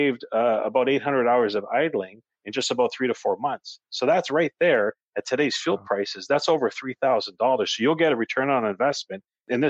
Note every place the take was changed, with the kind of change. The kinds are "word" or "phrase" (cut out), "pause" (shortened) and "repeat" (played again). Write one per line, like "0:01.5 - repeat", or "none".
none